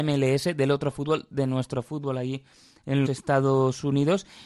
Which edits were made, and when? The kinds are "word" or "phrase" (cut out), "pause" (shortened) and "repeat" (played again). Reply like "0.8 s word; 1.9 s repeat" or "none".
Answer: 3.1 s word

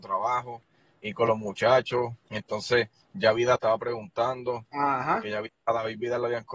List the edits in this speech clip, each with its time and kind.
2.2 s pause; 3.6 s phrase; 5.5 s pause

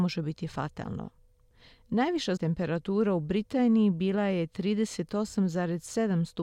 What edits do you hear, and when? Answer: 2.4 s word

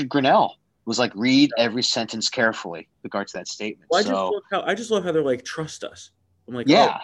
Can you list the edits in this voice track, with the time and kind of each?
none

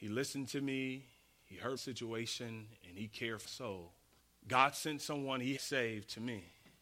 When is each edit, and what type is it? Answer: 1.8 s word; 3.4 s word; 4.2 s pause; 5.6 s word

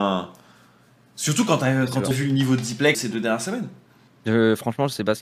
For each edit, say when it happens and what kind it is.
2.1 s word; 2.9 s word; 4.1 s pause

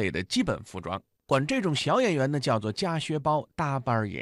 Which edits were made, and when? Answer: none

